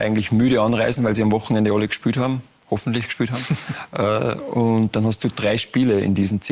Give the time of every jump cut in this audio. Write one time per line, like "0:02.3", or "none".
none

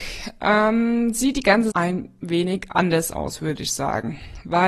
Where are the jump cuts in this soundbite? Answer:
0:01.7

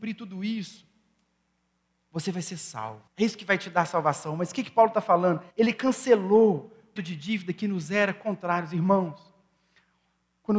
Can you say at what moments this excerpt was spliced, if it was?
0:03.1
0:05.5
0:07.0

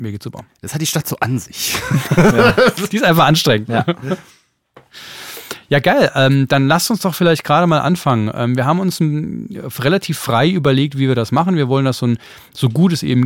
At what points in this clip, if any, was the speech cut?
none

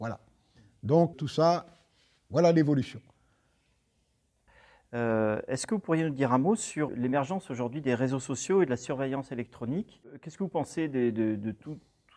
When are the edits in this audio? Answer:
0:01.1
0:06.9

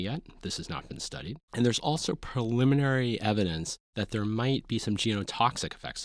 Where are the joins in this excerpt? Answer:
0:01.4

